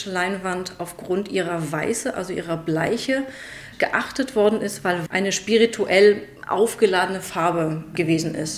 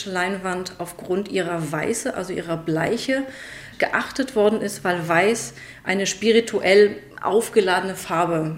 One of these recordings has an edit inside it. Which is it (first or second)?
first